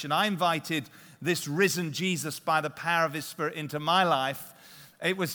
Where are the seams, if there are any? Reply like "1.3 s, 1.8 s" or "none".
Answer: none